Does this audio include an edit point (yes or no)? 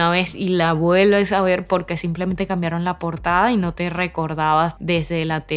no